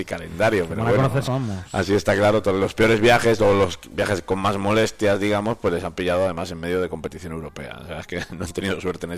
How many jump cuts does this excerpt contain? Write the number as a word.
one